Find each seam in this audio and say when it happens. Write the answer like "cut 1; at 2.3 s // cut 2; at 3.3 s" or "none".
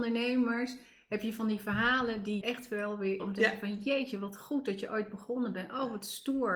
cut 1; at 2.4 s // cut 2; at 3.2 s